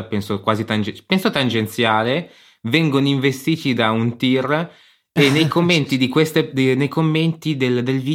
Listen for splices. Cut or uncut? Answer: uncut